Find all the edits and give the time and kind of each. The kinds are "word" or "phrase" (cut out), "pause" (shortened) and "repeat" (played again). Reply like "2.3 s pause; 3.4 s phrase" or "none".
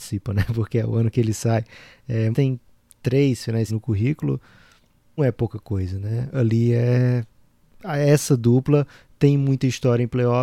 2.3 s word; 3.7 s word; 5.2 s word